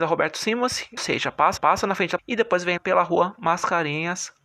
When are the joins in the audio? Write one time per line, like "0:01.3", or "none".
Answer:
0:01.0
0:01.6
0:02.2
0:02.8